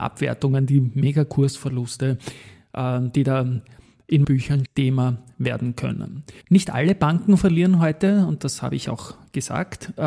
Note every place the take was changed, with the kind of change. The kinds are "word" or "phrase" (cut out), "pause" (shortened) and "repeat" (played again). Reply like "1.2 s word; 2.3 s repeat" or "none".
4.2 s word; 4.7 s phrase; 6.4 s pause